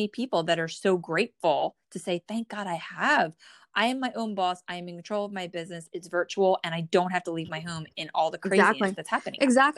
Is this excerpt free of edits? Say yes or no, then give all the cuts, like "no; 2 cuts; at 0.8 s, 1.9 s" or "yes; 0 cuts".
yes; 0 cuts